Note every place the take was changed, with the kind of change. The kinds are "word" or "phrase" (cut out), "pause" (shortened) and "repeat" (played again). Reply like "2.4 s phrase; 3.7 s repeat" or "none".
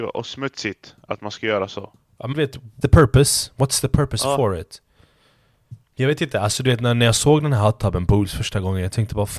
2.3 s word; 2.8 s word; 5.8 s pause

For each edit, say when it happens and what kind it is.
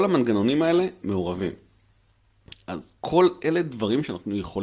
1.0 s word; 3.0 s pause

